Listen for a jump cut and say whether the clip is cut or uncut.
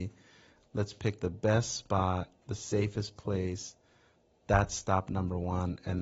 uncut